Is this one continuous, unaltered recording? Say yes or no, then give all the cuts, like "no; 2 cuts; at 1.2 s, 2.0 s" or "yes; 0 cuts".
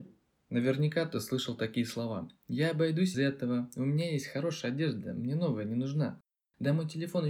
no; 1 cut; at 3.1 s